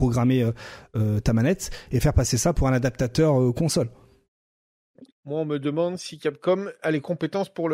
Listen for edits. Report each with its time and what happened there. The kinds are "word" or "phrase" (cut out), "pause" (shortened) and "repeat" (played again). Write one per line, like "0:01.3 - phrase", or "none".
0:05.1 - pause